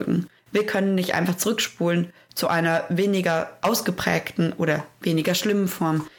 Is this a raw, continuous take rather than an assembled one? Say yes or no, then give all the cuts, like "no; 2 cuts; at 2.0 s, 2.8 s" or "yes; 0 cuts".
yes; 0 cuts